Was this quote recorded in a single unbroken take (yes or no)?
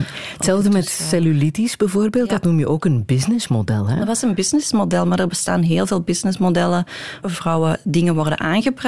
no